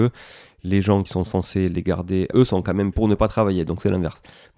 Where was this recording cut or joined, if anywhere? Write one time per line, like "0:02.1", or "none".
0:01.1
0:02.3
0:02.9